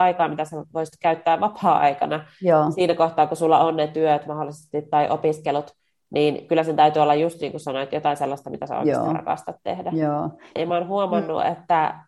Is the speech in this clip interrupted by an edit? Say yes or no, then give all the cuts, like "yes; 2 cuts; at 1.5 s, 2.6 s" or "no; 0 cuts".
no; 0 cuts